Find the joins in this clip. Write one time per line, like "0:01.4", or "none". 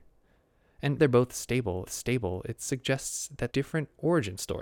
0:01.0
0:01.8
0:03.5